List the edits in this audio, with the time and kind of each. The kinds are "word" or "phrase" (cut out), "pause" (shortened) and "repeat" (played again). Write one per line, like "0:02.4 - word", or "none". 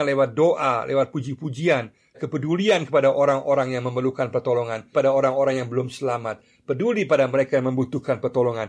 0:02.1 - phrase
0:04.9 - word